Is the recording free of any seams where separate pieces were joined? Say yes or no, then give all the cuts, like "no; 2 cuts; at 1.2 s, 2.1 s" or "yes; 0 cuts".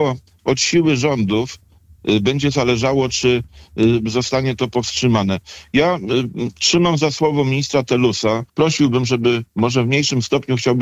no; 2 cuts; at 8.5 s, 9.5 s